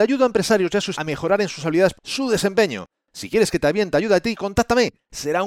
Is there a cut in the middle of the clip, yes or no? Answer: yes